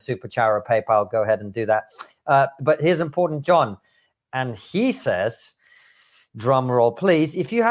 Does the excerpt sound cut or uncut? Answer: uncut